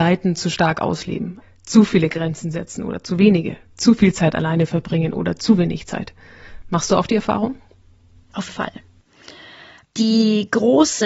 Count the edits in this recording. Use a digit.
2